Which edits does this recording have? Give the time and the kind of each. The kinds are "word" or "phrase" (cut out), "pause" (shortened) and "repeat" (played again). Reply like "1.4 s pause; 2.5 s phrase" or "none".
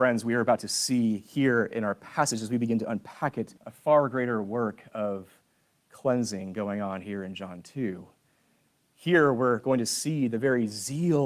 3.6 s pause